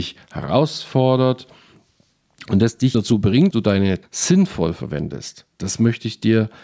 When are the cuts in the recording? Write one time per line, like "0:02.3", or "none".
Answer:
0:02.9
0:03.5
0:04.0